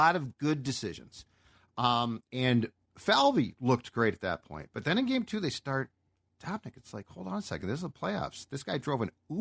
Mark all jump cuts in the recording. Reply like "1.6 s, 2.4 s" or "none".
2.3 s

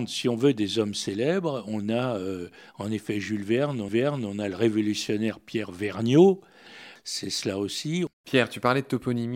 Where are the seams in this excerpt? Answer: 3.9 s, 8.1 s

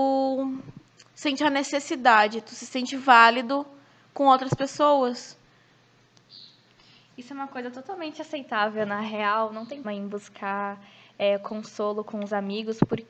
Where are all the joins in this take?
9.8 s

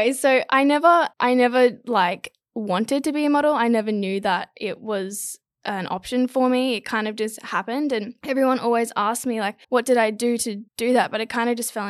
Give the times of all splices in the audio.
1.1 s, 9.6 s, 10.7 s

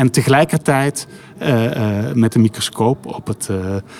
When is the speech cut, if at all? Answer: none

